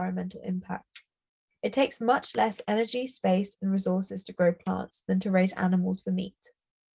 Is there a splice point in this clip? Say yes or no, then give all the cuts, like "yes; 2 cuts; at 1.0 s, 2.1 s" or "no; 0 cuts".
no; 0 cuts